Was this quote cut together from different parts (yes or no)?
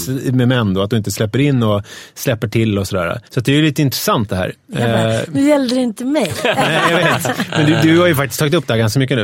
yes